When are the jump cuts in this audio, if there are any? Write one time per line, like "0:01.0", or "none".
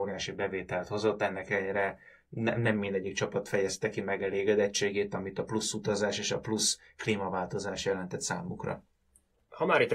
none